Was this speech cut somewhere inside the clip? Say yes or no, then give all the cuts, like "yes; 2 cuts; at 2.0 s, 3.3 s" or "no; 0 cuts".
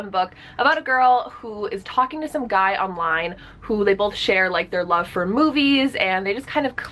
no; 0 cuts